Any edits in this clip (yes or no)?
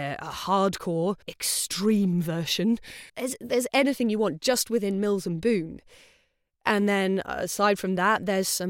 yes